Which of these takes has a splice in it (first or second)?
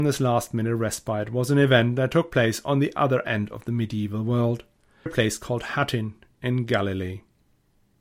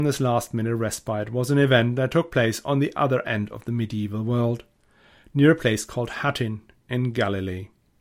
first